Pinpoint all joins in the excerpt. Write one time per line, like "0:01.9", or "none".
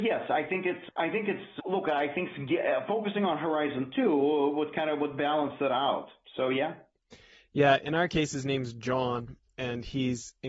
none